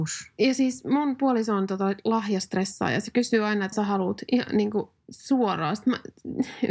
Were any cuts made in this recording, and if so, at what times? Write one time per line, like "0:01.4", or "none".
0:03.7